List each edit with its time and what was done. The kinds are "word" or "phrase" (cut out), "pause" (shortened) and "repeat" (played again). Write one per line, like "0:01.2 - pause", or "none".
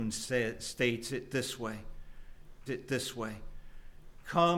0:02.7 - repeat